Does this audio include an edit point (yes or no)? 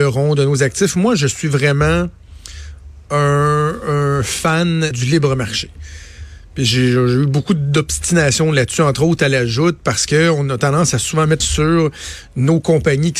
yes